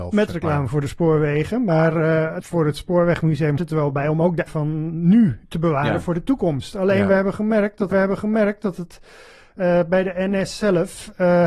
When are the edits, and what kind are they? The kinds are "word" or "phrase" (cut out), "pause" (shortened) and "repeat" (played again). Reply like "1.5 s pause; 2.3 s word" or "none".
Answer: 2.4 s word; 3.6 s word; 4.5 s word; 7.9 s repeat